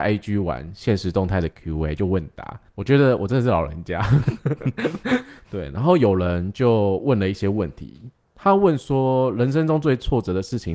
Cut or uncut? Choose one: cut